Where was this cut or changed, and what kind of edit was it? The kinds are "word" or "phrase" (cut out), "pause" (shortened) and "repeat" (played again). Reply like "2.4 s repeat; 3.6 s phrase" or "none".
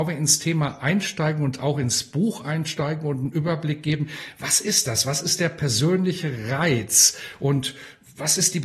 none